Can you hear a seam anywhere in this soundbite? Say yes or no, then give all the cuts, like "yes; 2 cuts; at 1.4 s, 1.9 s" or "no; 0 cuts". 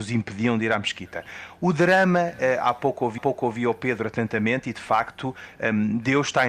yes; 1 cut; at 3.2 s